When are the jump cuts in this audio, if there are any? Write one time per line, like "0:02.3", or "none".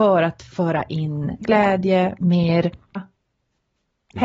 0:01.4
0:03.0